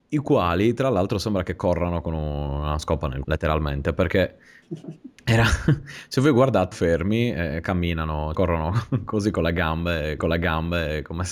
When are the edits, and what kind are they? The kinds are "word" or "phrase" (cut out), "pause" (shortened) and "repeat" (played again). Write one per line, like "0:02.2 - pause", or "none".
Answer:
0:03.2 - word
0:05.1 - pause
0:06.7 - phrase
0:08.3 - word
0:10.2 - repeat